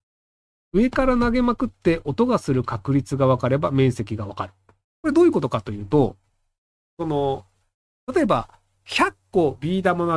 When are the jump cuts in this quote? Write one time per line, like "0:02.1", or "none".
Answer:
none